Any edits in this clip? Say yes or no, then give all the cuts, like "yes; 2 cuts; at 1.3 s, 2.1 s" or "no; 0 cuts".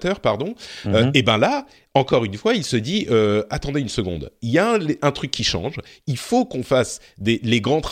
no; 0 cuts